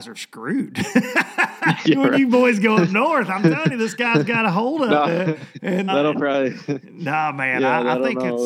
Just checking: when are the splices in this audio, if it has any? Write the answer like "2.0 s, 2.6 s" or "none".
1.8 s, 5.9 s